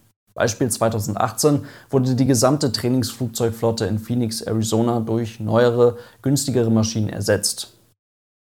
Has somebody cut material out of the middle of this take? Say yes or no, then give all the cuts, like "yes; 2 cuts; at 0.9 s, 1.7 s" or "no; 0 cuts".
no; 0 cuts